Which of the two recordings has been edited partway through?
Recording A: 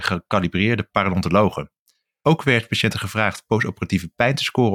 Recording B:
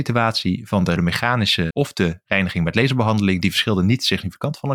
B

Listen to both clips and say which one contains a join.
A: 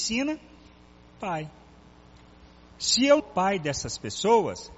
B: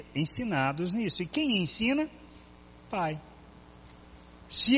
A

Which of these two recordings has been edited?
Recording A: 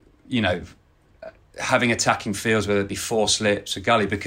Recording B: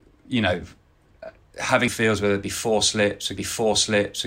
B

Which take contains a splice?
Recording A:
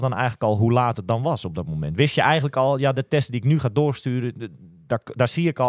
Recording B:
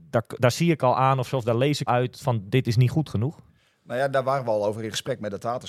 B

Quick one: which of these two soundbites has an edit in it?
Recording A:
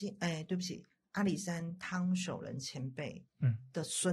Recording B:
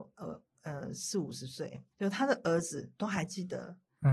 B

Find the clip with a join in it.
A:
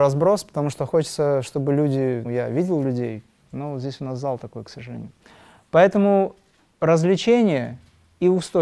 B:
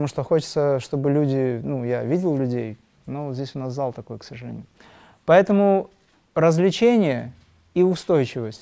A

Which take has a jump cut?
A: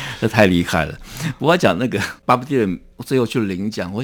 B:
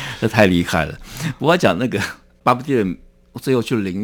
A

